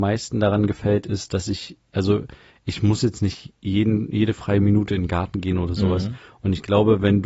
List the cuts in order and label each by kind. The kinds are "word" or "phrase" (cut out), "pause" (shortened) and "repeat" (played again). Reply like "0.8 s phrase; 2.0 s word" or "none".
none